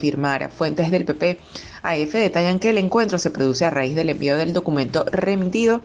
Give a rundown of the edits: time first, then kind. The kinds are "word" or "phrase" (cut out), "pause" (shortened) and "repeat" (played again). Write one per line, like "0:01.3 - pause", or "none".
none